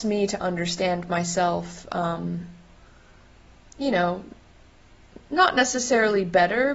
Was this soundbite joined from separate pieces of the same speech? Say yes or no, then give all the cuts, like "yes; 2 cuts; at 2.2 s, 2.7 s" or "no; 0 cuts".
no; 0 cuts